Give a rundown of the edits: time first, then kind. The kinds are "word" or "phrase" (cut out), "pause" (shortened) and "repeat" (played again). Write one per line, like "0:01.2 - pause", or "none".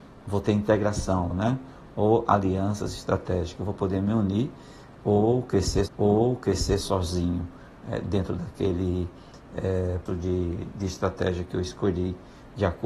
0:01.3 - word
0:05.9 - repeat
0:10.1 - word